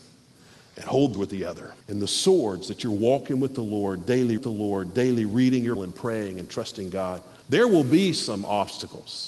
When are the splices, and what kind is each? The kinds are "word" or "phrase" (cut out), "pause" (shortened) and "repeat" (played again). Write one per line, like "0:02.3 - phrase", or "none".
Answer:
0:01.1 - phrase
0:01.8 - pause
0:04.4 - repeat
0:05.8 - word
0:07.4 - pause